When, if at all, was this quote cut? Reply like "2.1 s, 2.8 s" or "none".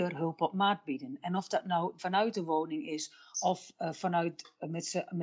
2.0 s